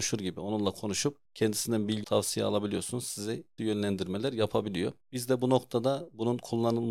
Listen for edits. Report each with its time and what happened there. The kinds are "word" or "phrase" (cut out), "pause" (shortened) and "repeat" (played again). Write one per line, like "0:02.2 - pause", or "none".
0:01.3 - pause
0:02.0 - word
0:03.6 - word
0:05.0 - pause